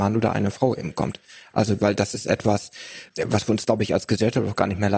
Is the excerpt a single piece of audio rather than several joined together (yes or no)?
yes